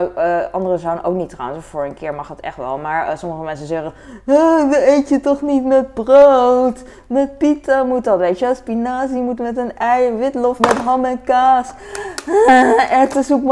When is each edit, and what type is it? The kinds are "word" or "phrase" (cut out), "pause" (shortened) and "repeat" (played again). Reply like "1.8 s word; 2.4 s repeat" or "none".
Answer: 10.6 s word

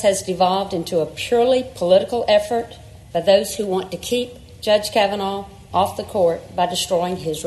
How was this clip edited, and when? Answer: none

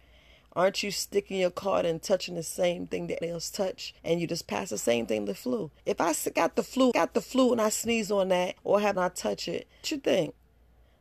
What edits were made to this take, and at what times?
3.2 s word; 4.0 s pause; 5.8 s pause; 6.9 s repeat; 8.6 s pause; 8.9 s phrase; 9.8 s word

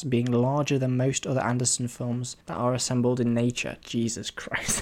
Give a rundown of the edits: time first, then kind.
2.4 s pause

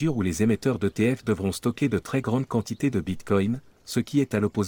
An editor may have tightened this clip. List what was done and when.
none

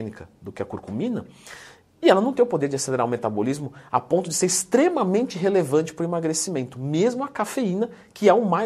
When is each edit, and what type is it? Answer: none

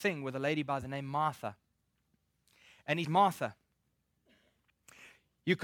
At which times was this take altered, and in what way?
3.0 s word

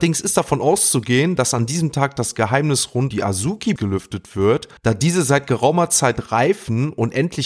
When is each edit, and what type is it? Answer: 3.1 s word; 3.8 s word; 4.8 s pause

